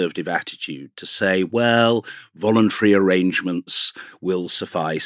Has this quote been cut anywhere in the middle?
no; 0 cuts

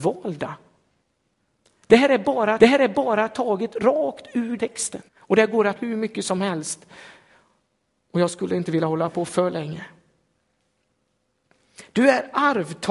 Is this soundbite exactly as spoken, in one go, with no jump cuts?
no; 4 cuts; at 2.6 s, 4.6 s, 5.1 s, 5.8 s

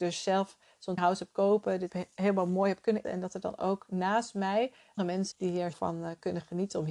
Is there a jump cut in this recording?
yes; 7 cuts; at 1.0 s, 1.3 s, 1.9 s, 3.0 s, 5.0 s, 5.3 s, 5.7 s

